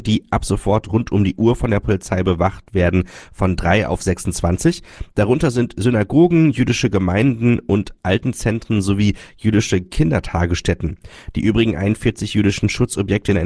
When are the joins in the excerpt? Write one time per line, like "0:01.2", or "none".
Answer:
none

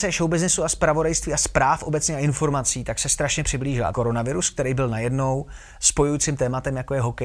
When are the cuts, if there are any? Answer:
0:03.9

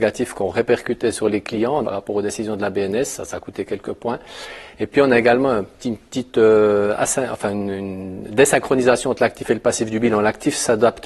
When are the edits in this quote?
0:01.8

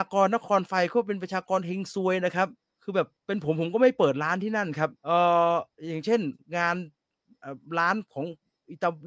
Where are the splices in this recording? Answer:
0:02.6
0:03.2
0:05.0

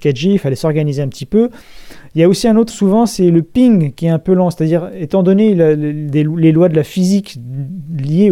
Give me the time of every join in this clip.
0:02.7

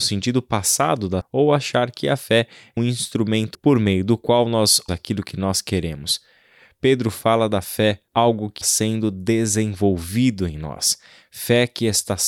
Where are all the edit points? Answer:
0:01.2
0:02.8
0:03.5
0:04.9
0:08.1
0:08.6

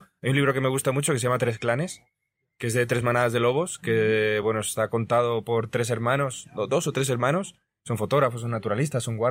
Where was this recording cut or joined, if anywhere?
none

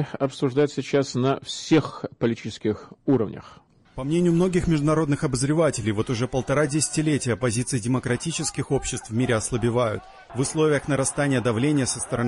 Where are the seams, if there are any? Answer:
none

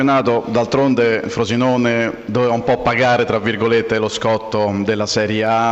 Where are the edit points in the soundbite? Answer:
none

